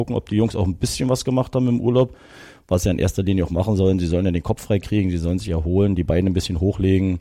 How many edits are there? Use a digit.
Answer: 0